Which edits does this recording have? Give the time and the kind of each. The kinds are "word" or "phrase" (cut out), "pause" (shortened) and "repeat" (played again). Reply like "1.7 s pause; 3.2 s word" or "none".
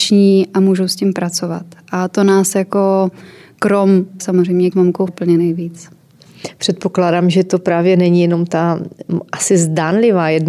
4.2 s word; 4.7 s word; 5.1 s word